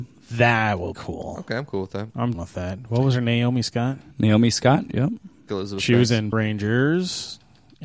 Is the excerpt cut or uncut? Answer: cut